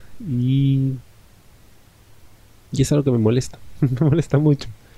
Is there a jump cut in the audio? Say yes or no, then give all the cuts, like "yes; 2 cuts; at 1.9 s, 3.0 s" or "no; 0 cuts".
no; 0 cuts